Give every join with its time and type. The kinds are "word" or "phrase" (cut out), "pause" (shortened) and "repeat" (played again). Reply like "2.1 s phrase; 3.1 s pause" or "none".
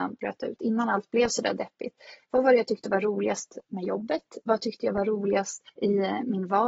5.7 s pause

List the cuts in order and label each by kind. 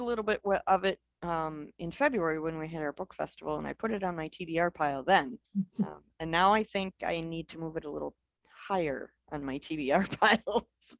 5.4 s pause

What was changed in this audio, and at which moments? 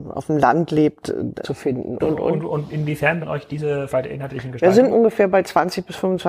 1.4 s word; 2.0 s word; 3.2 s word; 3.9 s word; 4.9 s word

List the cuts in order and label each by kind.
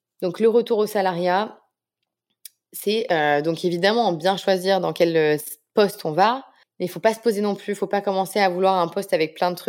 6.6 s pause

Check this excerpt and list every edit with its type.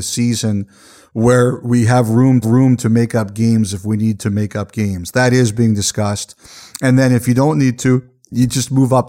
2.4 s repeat

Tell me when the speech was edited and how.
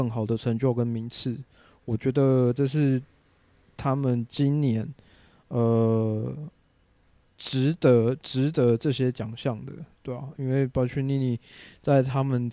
none

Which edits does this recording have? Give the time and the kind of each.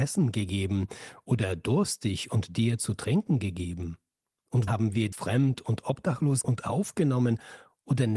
4.7 s word; 5.1 s word; 6.4 s word

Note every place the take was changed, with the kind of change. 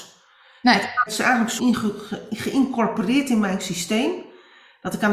1.1 s word; 1.6 s phrase

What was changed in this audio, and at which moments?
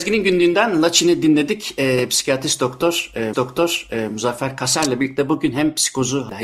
3.3 s repeat

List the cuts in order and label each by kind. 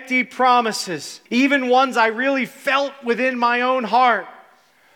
1.3 s pause

